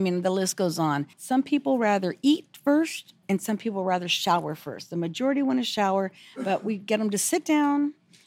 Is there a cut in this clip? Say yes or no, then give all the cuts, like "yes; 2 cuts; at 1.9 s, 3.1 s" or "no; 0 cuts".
yes; 2 cuts; at 1.1 s, 3.2 s